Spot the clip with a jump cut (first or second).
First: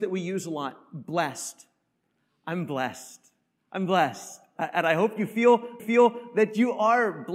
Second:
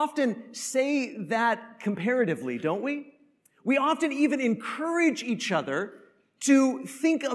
first